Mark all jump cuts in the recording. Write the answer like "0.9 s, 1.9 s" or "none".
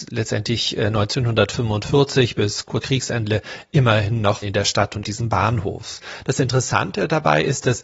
2.8 s, 4.4 s, 5.0 s